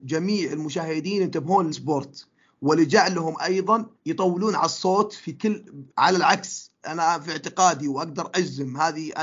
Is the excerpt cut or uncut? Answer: cut